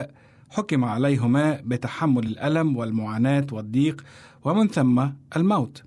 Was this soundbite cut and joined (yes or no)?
no